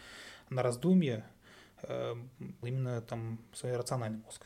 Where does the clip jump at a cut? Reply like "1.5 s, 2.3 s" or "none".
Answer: 2.6 s